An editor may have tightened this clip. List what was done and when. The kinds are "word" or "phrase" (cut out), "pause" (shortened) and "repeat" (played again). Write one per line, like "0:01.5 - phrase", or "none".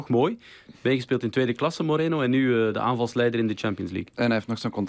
none